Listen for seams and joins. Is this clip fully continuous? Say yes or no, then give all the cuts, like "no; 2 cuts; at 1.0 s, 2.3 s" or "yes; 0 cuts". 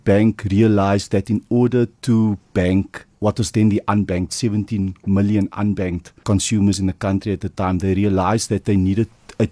no; 1 cut; at 4.3 s